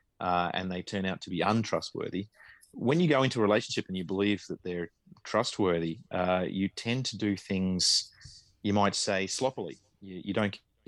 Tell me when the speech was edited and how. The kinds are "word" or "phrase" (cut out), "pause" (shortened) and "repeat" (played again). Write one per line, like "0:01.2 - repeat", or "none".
none